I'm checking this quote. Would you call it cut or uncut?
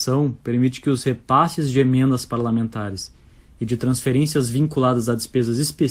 uncut